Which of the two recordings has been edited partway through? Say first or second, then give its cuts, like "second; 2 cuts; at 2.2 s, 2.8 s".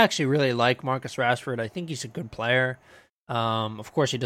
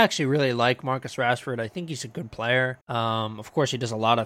second; 1 cut; at 2.8 s